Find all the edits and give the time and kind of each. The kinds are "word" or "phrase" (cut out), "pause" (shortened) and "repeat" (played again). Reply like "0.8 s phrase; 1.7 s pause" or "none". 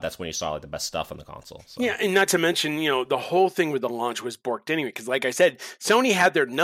none